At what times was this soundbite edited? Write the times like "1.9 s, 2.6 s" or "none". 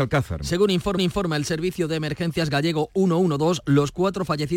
1.0 s